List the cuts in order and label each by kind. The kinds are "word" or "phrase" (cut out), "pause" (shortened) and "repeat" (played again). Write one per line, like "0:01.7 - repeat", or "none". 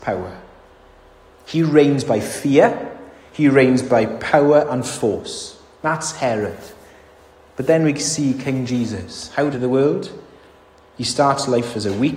0:09.5 - phrase